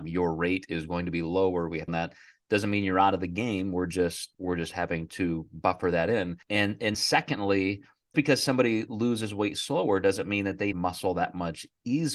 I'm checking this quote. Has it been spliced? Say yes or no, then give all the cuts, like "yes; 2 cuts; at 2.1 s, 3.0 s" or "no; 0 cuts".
yes; 6 cuts; at 1.9 s, 4.3 s, 6.4 s, 6.9 s, 8.1 s, 10.7 s